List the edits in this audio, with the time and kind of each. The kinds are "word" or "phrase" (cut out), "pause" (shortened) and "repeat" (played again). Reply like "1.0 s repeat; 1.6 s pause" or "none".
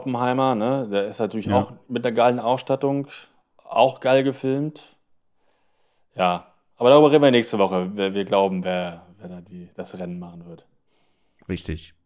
none